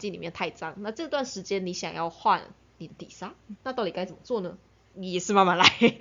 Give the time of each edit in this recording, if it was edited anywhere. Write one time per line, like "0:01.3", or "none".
0:03.6